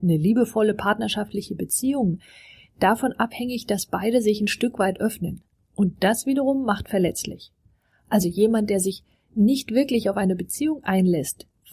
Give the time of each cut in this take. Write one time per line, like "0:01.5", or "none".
none